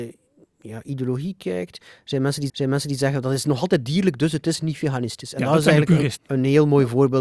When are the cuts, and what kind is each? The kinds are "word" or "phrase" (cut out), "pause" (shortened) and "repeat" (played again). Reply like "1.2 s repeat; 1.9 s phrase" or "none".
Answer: 2.5 s repeat; 6.2 s word